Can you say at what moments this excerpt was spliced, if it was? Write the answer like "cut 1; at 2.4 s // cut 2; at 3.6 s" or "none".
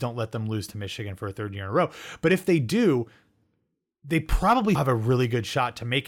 cut 1; at 4.7 s